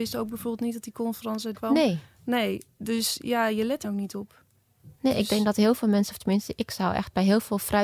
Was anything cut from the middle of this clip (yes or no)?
yes